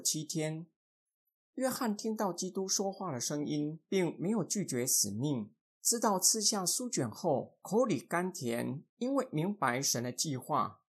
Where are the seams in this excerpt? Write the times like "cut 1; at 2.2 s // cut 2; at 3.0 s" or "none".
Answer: cut 1; at 8.9 s